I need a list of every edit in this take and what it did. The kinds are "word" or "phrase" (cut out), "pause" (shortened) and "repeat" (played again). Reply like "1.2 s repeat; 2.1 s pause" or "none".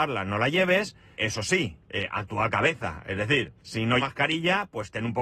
1.2 s word; 1.8 s pause; 2.5 s word; 3.6 s pause; 4.0 s phrase